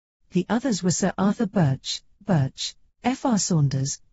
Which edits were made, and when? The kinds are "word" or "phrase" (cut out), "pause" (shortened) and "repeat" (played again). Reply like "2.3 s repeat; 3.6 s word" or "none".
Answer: 2.2 s repeat